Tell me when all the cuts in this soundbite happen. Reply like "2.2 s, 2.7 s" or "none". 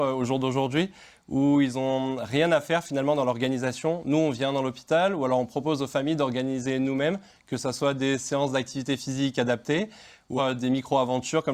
10.4 s